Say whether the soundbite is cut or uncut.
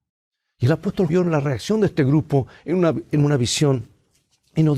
cut